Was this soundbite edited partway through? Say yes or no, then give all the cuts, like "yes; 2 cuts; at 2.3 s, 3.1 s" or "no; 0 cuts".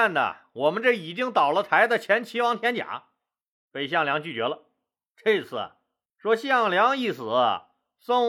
no; 0 cuts